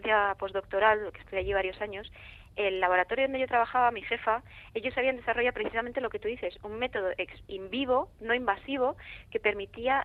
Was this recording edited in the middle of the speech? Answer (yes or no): yes